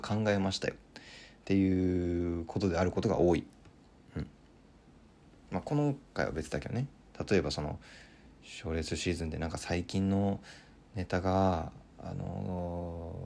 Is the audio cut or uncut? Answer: uncut